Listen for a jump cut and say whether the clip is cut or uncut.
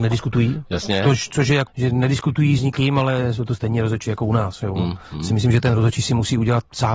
cut